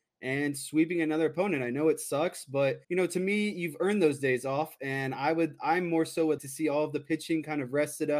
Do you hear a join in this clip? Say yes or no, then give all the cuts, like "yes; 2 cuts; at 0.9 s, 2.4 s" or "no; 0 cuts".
yes; 2 cuts; at 2.8 s, 6.4 s